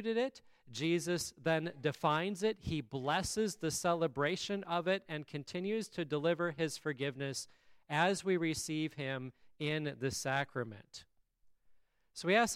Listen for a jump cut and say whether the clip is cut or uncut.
uncut